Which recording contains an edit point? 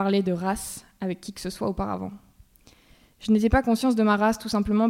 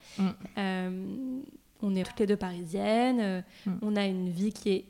second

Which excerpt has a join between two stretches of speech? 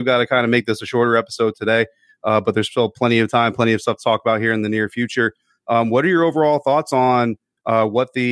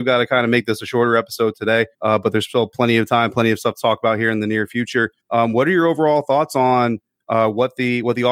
second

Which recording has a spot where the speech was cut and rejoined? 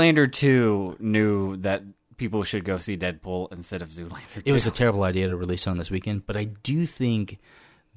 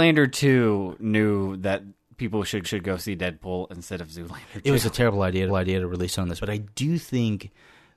second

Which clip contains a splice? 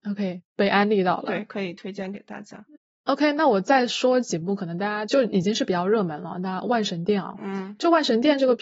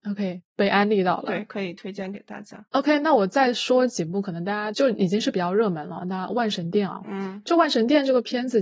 second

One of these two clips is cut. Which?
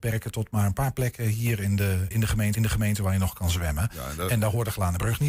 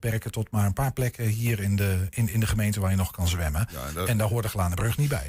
first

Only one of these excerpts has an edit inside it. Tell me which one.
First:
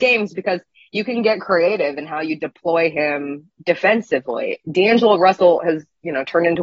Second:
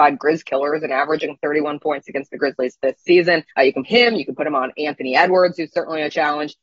second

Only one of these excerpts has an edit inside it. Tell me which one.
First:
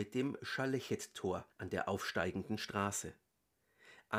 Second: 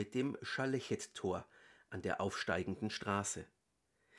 first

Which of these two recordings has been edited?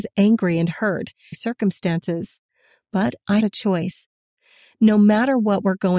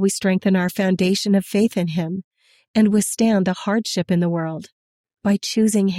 first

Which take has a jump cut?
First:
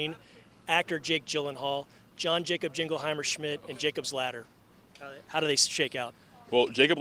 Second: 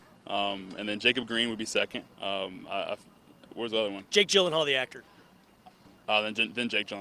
second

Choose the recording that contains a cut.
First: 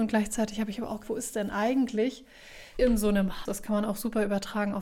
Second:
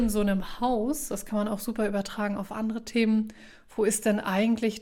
first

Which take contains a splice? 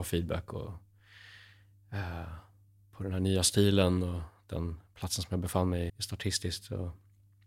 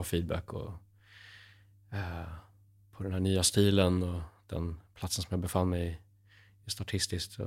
first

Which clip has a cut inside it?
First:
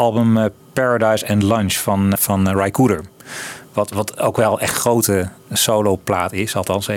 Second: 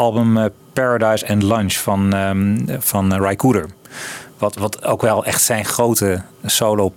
first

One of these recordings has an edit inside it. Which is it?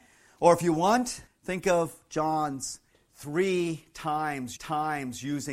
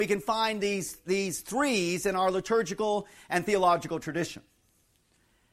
first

